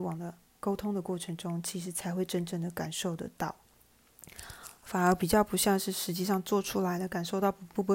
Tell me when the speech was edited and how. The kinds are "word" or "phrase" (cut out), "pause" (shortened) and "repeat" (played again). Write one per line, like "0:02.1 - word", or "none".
0:04.8 - pause